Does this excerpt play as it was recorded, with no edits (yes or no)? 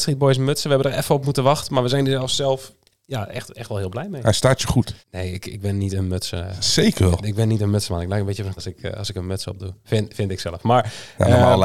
no